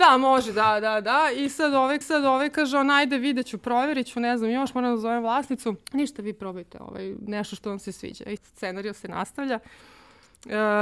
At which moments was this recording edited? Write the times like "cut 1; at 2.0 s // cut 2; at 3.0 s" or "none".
cut 1; at 2.0 s // cut 2; at 5.8 s // cut 3; at 8.4 s